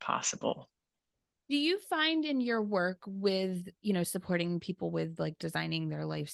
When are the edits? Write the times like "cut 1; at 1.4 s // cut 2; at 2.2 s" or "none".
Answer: none